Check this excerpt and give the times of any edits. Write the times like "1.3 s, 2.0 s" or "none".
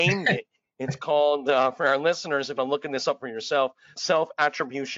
2.6 s, 4.0 s